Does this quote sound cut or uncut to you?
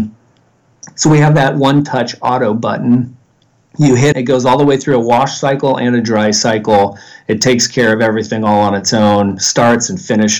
cut